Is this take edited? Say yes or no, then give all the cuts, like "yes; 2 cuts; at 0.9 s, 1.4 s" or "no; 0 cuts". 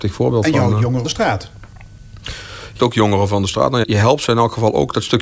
yes; 3 cuts; at 1.0 s, 2.8 s, 3.8 s